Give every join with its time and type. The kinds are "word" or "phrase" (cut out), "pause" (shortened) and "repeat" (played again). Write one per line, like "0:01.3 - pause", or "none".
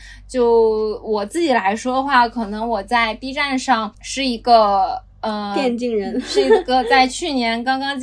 none